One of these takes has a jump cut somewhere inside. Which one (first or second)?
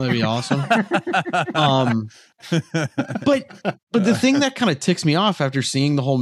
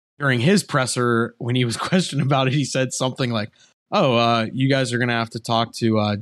first